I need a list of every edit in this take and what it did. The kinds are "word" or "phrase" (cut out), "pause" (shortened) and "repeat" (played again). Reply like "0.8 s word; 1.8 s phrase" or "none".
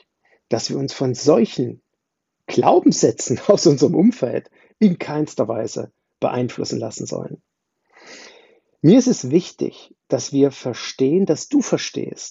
none